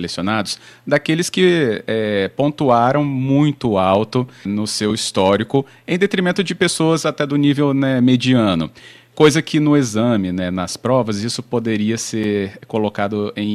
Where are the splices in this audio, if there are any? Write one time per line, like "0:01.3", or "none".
0:04.5

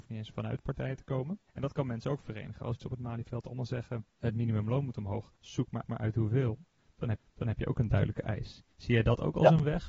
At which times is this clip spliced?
0:01.5
0:02.8
0:04.1
0:05.4
0:05.8
0:07.2
0:08.7

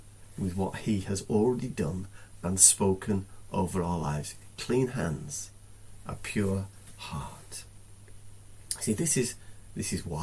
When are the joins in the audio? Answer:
none

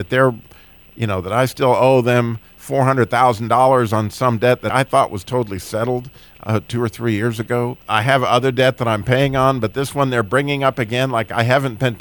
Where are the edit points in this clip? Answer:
0:04.7
0:07.8

